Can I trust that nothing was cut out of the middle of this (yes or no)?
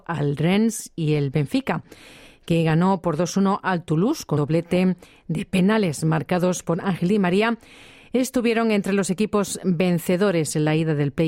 no